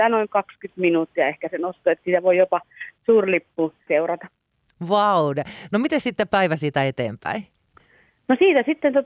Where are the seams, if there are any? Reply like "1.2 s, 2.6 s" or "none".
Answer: 3.9 s